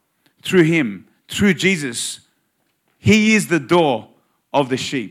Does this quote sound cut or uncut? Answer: uncut